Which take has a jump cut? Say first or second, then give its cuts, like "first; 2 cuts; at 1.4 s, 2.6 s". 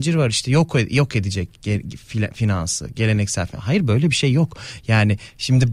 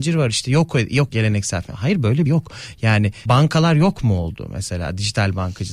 second; 3 cuts; at 1.1 s, 2.3 s, 3.3 s